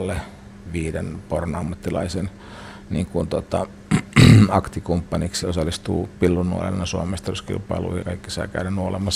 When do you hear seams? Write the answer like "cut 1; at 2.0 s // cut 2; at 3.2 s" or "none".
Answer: cut 1; at 5.4 s // cut 2; at 8.0 s